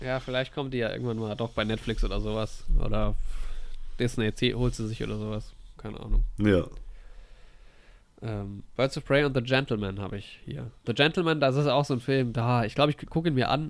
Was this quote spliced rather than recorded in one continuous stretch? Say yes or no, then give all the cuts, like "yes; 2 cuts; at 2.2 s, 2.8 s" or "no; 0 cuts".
no; 0 cuts